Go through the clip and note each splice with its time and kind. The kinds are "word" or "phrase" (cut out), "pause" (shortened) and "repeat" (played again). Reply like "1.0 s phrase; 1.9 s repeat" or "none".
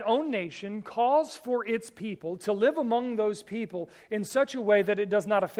none